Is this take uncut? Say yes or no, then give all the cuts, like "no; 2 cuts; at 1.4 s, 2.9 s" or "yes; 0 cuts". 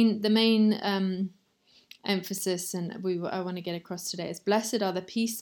yes; 0 cuts